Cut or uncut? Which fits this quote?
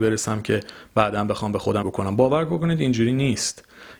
cut